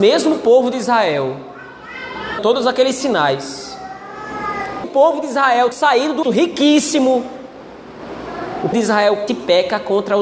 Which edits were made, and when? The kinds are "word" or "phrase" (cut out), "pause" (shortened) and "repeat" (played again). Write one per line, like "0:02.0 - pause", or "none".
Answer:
0:02.4 - word
0:04.8 - word
0:05.7 - word
0:06.2 - word
0:08.7 - word
0:09.3 - word